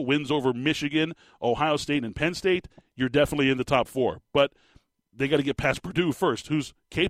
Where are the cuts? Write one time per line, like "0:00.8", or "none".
none